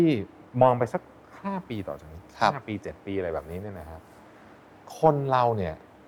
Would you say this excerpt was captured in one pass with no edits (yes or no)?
yes